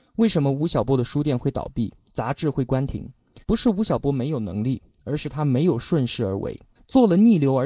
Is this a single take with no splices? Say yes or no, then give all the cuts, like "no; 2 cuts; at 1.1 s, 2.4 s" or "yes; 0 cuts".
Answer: no; 2 cuts; at 3.4 s, 6.8 s